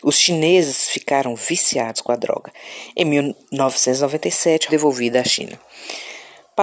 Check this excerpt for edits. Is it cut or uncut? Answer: cut